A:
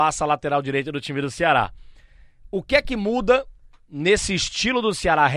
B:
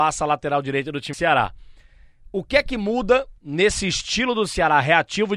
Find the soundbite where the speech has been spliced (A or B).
B